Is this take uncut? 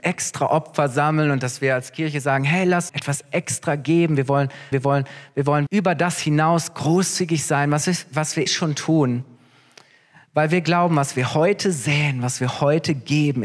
no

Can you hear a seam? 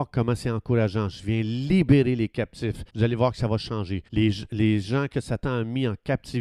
yes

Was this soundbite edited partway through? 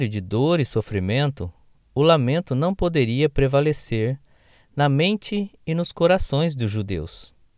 no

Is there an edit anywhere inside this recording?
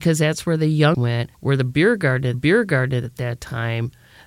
yes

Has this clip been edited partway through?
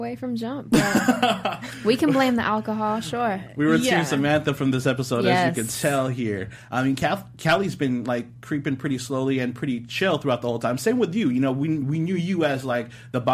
no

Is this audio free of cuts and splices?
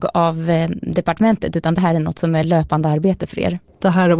yes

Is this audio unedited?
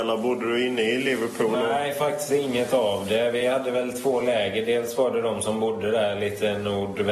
yes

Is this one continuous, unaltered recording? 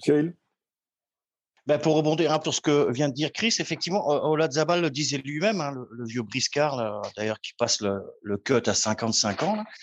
no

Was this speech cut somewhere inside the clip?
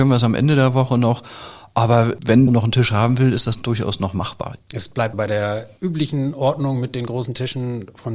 yes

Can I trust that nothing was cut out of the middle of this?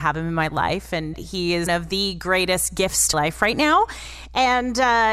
no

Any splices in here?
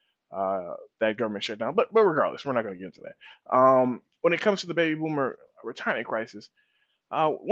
no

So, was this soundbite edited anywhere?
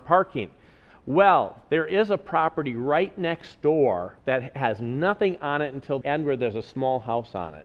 yes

